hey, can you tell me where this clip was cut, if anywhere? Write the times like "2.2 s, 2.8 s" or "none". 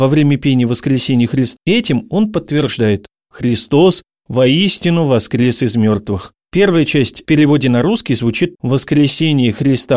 1.6 s, 6.4 s, 7.2 s, 8.5 s